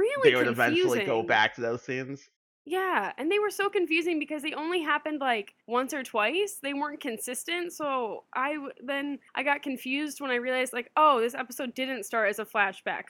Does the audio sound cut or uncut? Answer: cut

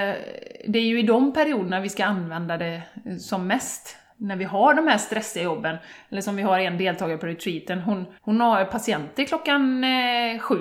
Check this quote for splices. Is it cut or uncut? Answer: cut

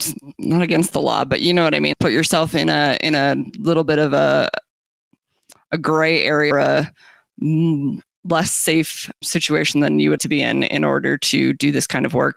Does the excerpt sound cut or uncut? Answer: cut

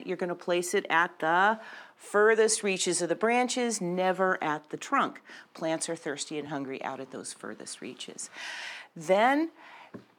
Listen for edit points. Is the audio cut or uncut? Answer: uncut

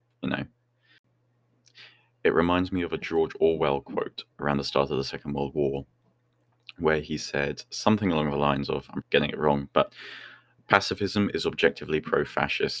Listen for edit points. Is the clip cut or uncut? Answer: cut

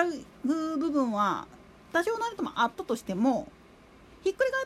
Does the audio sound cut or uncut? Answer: uncut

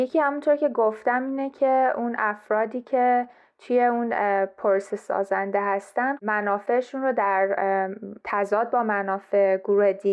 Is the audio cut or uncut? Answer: cut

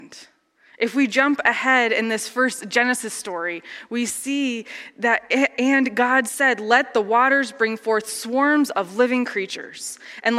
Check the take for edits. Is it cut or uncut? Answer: uncut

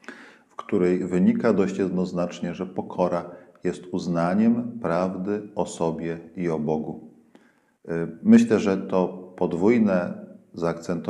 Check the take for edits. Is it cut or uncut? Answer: uncut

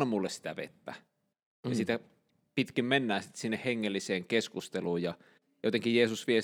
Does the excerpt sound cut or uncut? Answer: uncut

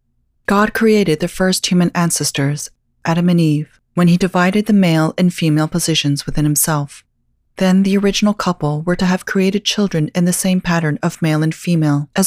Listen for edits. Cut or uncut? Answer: uncut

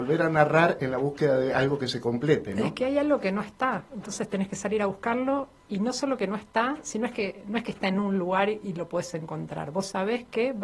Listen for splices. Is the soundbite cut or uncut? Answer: uncut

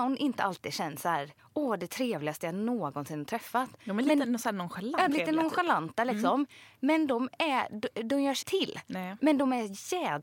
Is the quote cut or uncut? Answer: cut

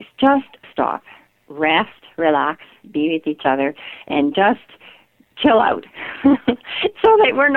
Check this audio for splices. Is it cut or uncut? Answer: uncut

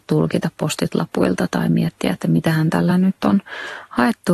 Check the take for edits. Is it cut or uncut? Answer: uncut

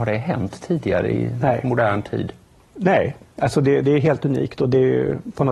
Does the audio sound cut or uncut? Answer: uncut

